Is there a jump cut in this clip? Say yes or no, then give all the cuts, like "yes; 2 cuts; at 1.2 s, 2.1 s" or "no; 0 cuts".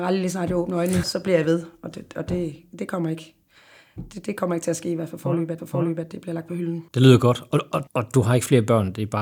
yes; 4 cuts; at 1.0 s, 5.6 s, 6.9 s, 7.9 s